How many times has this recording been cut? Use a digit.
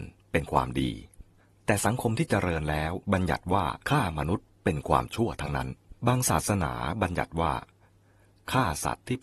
4